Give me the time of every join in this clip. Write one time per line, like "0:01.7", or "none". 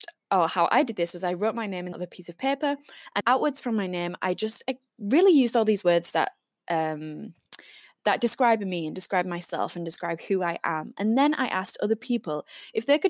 0:01.9
0:03.2
0:04.9